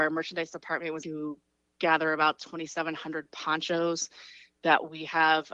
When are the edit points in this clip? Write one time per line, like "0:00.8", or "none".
0:01.0